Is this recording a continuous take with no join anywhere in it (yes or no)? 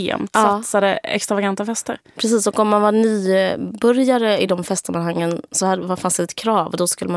yes